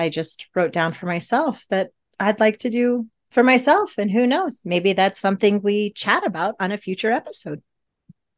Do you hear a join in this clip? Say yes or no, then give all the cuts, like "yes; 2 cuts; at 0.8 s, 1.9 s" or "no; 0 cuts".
no; 0 cuts